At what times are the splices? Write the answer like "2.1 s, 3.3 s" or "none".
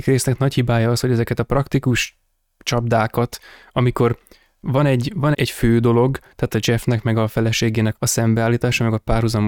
5.3 s, 7.9 s